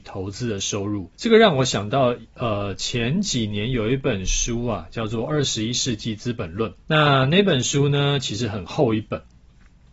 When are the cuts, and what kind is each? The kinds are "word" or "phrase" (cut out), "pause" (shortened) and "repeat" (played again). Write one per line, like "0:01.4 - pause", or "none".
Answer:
0:01.1 - pause
0:06.8 - pause